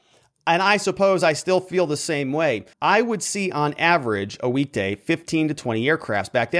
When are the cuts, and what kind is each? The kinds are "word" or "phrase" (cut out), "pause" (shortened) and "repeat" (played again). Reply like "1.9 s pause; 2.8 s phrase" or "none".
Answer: 2.7 s pause